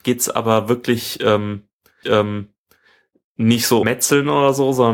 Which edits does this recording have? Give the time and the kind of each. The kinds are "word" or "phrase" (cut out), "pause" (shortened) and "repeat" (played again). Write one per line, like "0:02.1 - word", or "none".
0:02.0 - repeat
0:03.8 - word